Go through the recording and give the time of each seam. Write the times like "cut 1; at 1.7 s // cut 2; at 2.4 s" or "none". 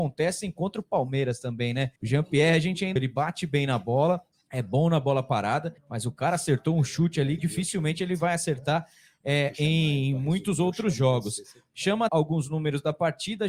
cut 1; at 2.0 s // cut 2; at 3.0 s // cut 3; at 4.3 s // cut 4; at 5.8 s // cut 5; at 7.4 s // cut 6; at 12.1 s